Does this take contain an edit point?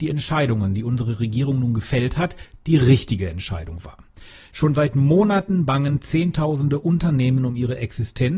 no; 0 cuts

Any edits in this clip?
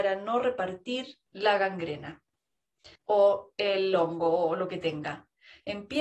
yes; 2 cuts; at 1.3 s, 2.9 s

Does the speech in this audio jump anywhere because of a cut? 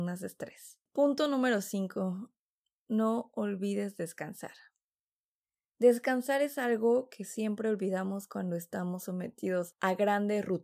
no; 0 cuts

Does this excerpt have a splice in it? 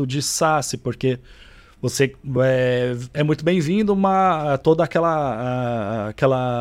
no; 0 cuts

